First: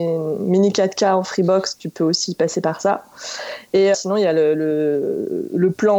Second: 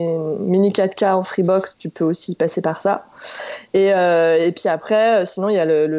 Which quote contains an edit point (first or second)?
first